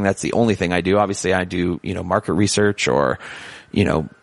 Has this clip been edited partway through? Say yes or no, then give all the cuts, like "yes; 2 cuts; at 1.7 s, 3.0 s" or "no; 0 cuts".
no; 0 cuts